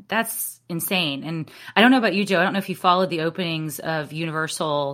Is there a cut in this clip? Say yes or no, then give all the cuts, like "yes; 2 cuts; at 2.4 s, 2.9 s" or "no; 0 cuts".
no; 0 cuts